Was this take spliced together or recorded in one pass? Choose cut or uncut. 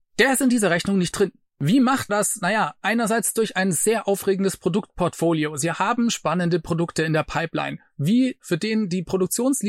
cut